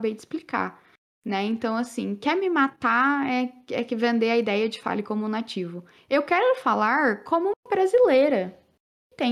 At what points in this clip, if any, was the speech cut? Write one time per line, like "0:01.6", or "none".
none